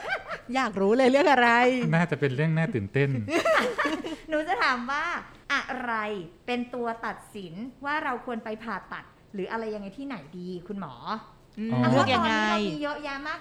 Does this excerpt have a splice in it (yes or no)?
yes